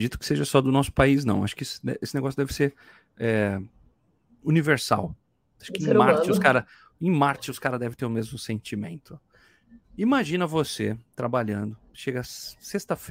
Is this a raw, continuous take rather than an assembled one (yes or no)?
yes